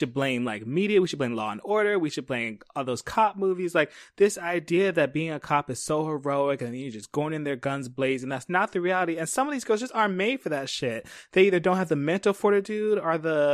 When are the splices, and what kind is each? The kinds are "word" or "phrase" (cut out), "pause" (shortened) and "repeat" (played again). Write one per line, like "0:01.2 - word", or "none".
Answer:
none

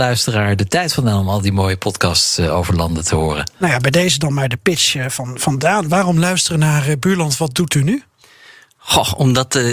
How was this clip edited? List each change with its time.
none

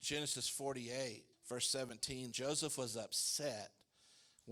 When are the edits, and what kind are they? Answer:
0:01.3 - pause
0:02.3 - word

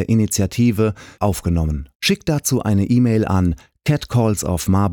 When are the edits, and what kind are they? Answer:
0:01.2 - phrase
0:01.9 - pause

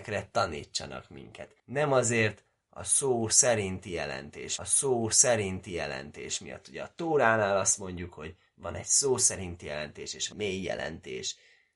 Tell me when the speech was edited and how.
0:01.6 - pause
0:04.6 - repeat
0:10.3 - word

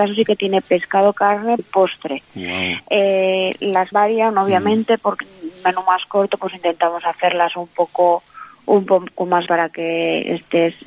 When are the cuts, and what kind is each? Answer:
0:01.6 - word
0:03.9 - word
0:05.2 - word
0:09.5 - word

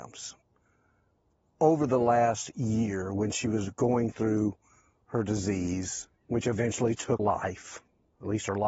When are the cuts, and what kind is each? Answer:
0:06.1 - pause
0:07.2 - word

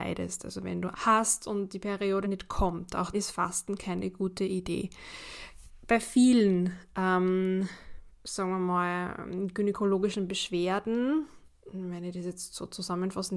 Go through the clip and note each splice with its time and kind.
0:00.9 - word
0:02.2 - word
0:03.1 - word

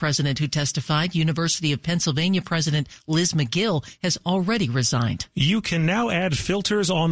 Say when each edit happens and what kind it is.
none

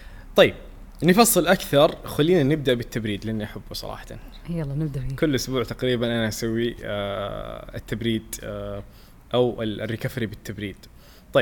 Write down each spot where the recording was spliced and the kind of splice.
none

